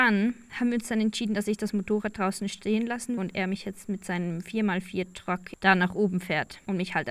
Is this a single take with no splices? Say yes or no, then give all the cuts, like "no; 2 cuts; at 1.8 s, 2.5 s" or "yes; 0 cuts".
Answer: no; 1 cut; at 3.2 s